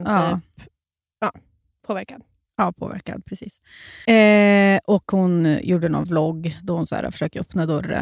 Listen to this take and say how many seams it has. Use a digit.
1